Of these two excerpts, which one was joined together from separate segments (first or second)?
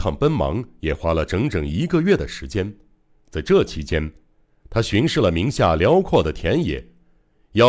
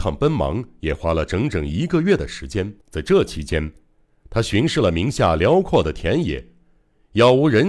second